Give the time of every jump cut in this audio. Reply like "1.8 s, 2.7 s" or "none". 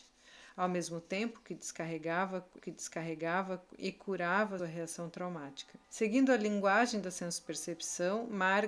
2.6 s, 4.6 s, 5.8 s